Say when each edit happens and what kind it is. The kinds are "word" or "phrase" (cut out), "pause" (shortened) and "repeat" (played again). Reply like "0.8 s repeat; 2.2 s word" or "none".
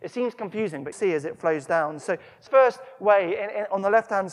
0.9 s word; 2.5 s word